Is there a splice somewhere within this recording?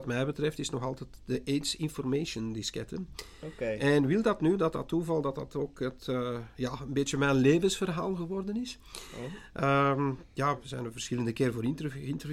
no; 0 cuts

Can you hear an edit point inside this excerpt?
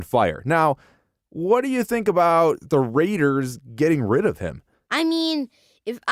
no; 0 cuts

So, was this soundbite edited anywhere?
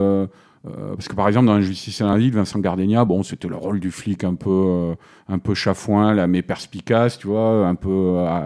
no; 0 cuts

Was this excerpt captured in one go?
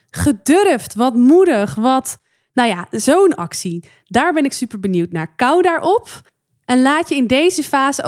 yes; 0 cuts

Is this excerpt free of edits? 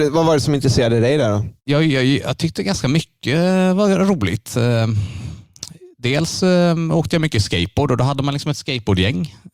no; 1 cut; at 1.6 s

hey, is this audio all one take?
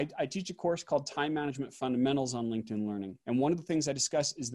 no; 1 cut; at 3.2 s

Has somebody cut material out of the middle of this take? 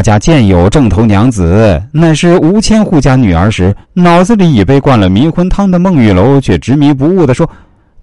yes; 1 cut; at 3.8 s

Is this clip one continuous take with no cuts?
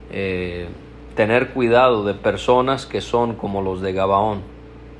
yes; 0 cuts

